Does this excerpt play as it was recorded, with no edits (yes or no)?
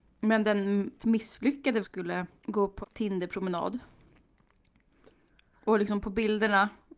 no